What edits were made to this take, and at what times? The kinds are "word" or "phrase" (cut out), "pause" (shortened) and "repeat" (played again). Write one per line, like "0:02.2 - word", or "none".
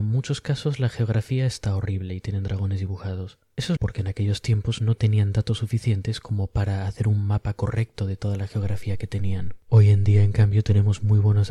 0:03.8 - word